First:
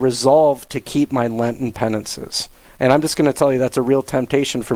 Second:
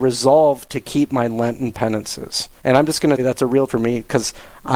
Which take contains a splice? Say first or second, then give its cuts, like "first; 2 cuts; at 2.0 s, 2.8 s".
second; 3 cuts; at 2.6 s, 3.2 s, 3.7 s